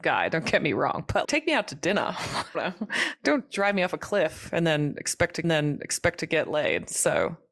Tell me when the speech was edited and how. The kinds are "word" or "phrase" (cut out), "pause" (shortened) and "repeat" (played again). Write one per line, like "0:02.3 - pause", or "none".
0:01.2 - phrase
0:02.5 - word
0:05.4 - repeat